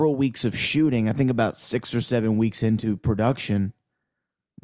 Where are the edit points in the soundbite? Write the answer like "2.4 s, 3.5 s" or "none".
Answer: none